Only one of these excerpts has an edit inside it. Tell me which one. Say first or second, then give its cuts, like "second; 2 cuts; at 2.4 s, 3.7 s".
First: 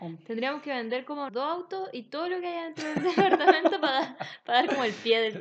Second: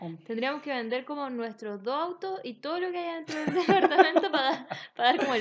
first; 1 cut; at 1.3 s